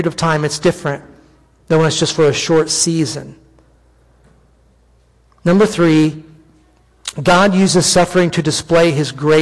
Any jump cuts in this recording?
no; 0 cuts

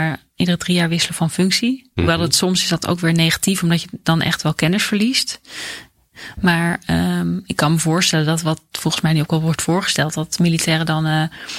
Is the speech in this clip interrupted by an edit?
no; 0 cuts

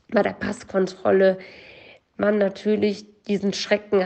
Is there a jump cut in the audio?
no; 0 cuts

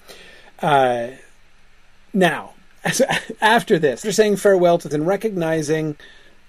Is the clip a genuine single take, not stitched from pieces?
no; 3 cuts; at 1.4 s, 4.0 s, 4.9 s

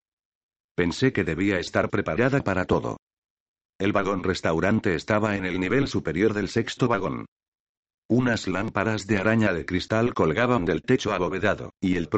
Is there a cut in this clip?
no; 0 cuts

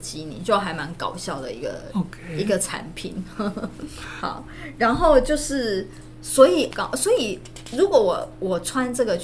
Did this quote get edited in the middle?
yes; 1 cut; at 6.7 s

